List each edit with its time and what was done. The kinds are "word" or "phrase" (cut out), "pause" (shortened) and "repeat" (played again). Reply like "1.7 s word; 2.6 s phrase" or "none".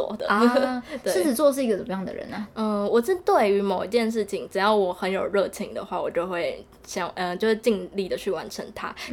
none